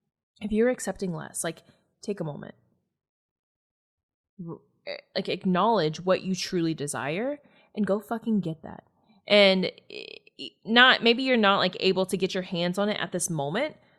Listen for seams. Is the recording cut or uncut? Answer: uncut